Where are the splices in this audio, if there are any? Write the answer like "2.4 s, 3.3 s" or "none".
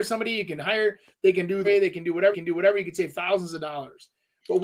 1.6 s, 2.3 s